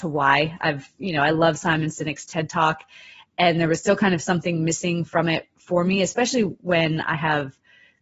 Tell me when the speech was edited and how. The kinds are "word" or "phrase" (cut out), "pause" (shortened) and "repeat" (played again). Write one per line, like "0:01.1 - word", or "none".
none